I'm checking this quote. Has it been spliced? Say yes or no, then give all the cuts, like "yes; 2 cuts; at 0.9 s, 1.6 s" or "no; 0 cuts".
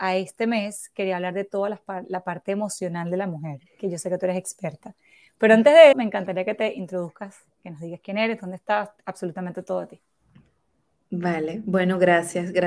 yes; 3 cuts; at 3.7 s, 5.9 s, 9.0 s